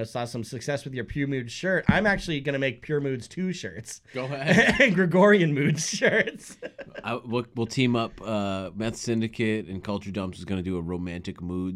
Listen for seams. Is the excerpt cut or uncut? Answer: uncut